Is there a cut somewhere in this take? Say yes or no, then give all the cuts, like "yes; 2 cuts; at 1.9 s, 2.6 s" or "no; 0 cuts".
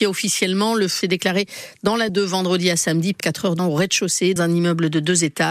yes; 5 cuts; at 1.0 s, 2.1 s, 3.2 s, 3.6 s, 4.4 s